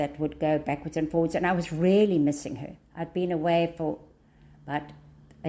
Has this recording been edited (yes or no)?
no